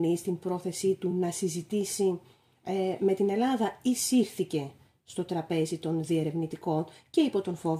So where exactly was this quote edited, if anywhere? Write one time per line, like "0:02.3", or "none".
none